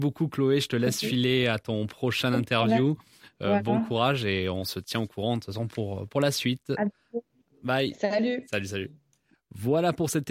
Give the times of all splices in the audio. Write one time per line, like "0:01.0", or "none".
none